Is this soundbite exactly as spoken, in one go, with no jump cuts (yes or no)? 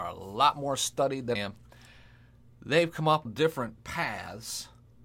no